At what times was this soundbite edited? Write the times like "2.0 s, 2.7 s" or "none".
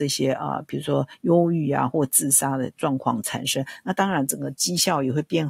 none